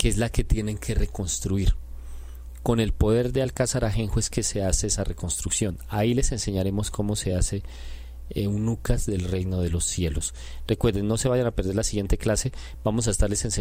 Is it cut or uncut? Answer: uncut